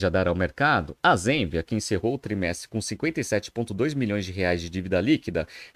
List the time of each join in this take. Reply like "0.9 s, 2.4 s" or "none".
none